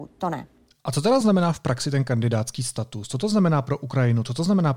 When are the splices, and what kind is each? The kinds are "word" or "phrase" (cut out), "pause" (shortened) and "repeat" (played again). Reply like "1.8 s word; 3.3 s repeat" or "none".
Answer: none